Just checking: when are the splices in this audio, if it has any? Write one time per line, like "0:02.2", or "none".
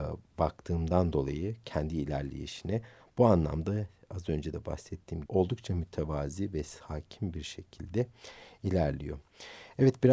0:05.3